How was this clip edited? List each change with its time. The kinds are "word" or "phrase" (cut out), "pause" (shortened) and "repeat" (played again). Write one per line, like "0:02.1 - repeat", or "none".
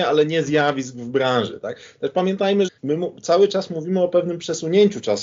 0:02.7 - word